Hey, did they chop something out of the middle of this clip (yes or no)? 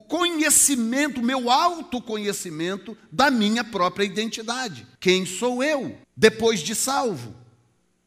yes